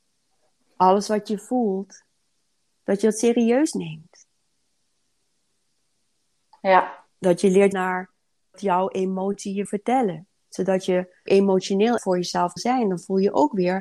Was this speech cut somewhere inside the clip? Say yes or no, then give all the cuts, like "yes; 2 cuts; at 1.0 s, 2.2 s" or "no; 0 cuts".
yes; 6 cuts; at 7.7 s, 8.5 s, 9.7 s, 11.3 s, 12.0 s, 12.6 s